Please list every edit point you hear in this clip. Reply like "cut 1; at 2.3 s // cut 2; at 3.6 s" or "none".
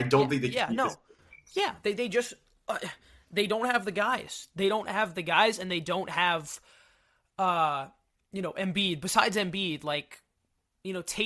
none